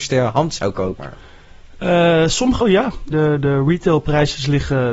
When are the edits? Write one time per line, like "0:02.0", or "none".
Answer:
0:01.0
0:02.6
0:03.1